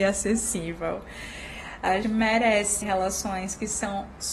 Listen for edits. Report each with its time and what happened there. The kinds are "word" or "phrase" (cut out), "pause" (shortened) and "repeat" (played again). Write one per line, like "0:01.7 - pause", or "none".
0:02.0 - word
0:02.8 - word